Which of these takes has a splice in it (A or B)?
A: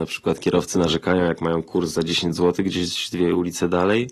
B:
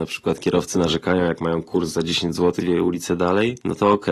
B